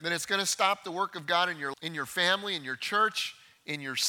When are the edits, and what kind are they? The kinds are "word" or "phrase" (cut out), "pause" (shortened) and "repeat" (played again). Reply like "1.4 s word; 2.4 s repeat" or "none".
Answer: 1.7 s word